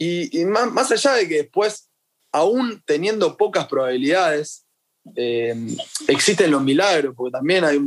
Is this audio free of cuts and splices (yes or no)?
yes